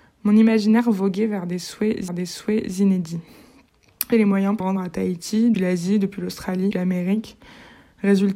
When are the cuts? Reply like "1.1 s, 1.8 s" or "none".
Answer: 2.1 s, 4.1 s, 4.6 s, 5.5 s, 6.7 s